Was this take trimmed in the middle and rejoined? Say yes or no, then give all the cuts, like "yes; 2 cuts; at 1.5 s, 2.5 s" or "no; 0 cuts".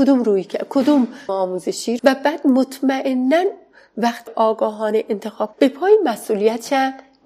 yes; 4 cuts; at 1.3 s, 2.0 s, 4.3 s, 5.5 s